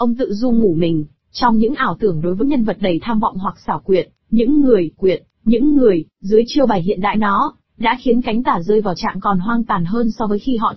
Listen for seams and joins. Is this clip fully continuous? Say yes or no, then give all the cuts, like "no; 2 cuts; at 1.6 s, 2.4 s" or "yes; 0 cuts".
no; 4 cuts; at 2.4 s, 5.0 s, 7.1 s, 9.0 s